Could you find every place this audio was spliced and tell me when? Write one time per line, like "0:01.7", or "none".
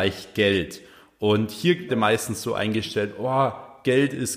0:01.9